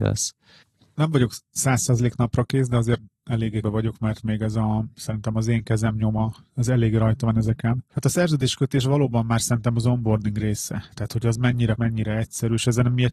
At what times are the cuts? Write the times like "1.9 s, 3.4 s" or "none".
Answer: 3.6 s, 7.9 s, 11.8 s